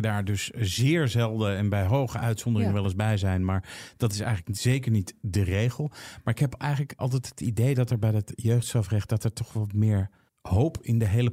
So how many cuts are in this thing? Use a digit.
2